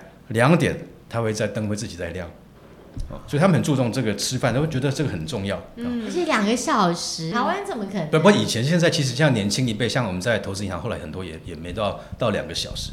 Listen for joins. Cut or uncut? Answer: cut